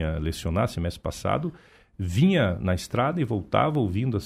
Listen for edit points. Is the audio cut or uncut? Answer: uncut